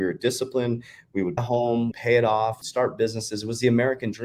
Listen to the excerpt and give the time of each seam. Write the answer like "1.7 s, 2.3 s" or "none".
1.4 s, 1.9 s, 2.6 s